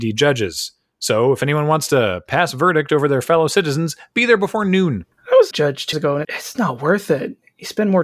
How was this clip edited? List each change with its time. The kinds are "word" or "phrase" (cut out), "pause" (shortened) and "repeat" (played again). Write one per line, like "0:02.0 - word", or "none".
0:05.5 - phrase
0:05.9 - word
0:06.2 - word